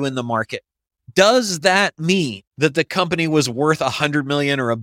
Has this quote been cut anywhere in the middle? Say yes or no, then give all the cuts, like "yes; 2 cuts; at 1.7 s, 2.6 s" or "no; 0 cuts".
yes; 1 cut; at 2.5 s